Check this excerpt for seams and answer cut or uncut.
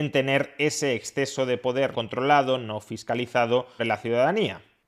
cut